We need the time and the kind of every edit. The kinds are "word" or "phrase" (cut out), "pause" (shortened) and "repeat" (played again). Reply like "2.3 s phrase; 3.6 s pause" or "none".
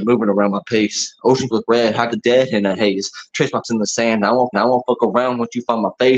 1.5 s word; 2.1 s word; 3.6 s word; 4.5 s repeat

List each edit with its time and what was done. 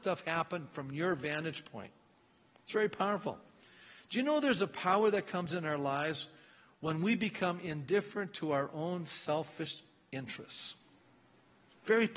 none

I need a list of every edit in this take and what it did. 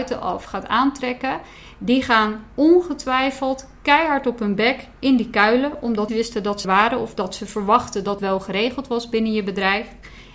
2.5 s pause; 6.1 s phrase; 6.6 s word; 8.2 s word

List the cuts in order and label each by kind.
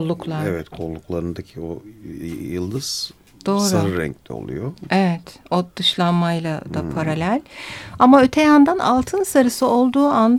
none

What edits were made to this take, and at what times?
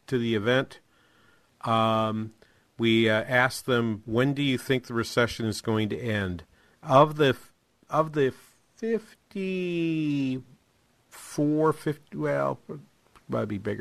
none

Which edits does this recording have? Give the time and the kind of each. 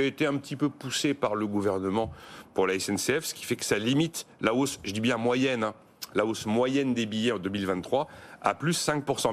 none

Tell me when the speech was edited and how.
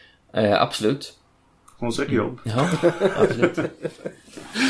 none

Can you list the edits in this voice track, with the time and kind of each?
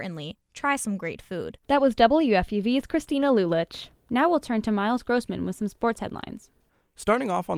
1.6 s pause; 4.0 s pause

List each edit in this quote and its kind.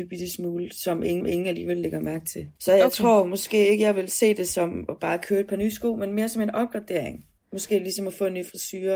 1.2 s repeat; 2.6 s pause; 7.4 s pause

